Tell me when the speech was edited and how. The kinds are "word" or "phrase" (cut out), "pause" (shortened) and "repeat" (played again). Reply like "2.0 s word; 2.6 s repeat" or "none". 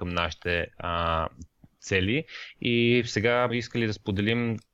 1.8 s word; 3.5 s word